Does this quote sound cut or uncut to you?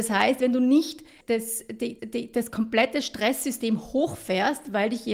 cut